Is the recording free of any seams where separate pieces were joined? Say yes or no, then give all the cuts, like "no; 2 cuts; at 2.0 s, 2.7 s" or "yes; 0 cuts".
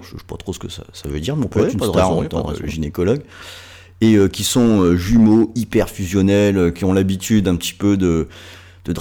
yes; 0 cuts